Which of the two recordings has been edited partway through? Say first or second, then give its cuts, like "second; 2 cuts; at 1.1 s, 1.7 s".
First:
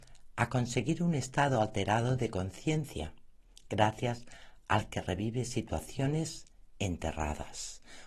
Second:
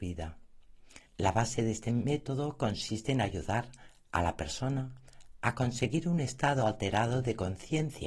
second; 1 cut; at 1.1 s